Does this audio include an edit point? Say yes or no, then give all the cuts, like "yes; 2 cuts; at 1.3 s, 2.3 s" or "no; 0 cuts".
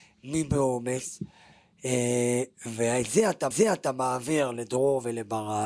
yes; 1 cut; at 3.5 s